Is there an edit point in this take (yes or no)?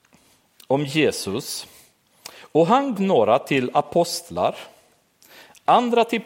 yes